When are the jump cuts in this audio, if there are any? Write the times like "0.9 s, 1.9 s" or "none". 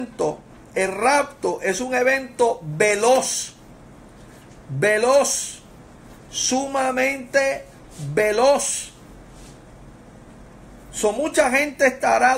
none